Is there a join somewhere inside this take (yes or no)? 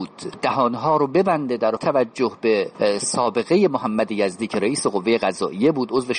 yes